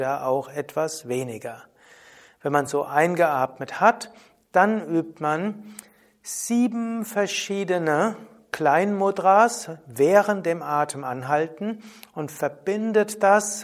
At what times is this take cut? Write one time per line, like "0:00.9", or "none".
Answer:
none